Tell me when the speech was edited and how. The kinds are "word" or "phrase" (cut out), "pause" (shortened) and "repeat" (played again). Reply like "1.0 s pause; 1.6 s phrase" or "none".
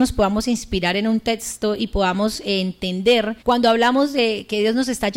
3.4 s pause